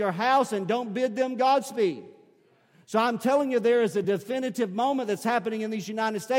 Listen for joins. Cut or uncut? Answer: uncut